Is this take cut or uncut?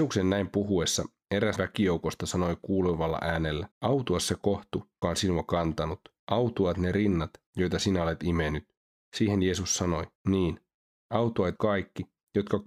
cut